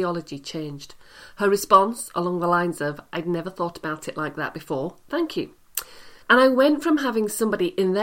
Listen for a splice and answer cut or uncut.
cut